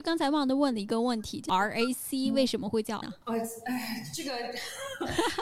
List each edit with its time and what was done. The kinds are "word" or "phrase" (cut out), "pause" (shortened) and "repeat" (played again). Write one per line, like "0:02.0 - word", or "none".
0:03.0 - word